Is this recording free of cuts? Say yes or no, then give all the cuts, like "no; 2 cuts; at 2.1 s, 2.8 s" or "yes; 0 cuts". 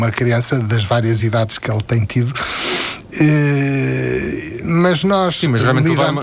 yes; 0 cuts